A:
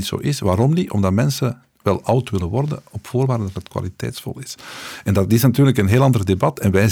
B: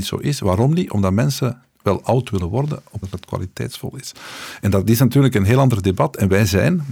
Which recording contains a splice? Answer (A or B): B